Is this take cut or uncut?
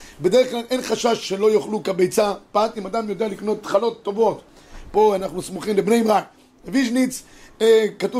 uncut